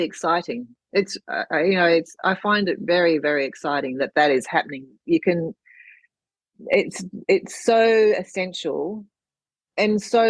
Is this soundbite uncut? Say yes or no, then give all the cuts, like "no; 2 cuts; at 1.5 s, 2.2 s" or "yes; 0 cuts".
yes; 0 cuts